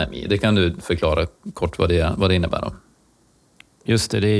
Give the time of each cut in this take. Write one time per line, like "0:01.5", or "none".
none